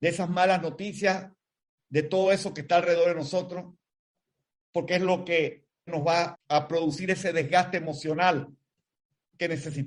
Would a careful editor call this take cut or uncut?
cut